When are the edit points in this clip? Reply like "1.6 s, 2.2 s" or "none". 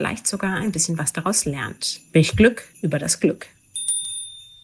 2.1 s, 2.7 s